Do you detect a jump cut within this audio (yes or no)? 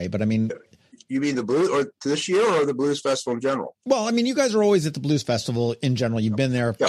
yes